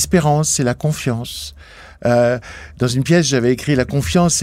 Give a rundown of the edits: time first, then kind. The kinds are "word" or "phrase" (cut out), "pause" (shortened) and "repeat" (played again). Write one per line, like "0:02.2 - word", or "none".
none